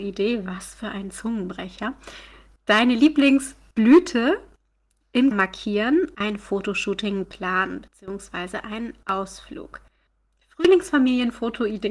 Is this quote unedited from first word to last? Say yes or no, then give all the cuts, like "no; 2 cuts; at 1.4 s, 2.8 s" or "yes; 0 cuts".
no; 3 cuts; at 5.3 s, 6.1 s, 7.2 s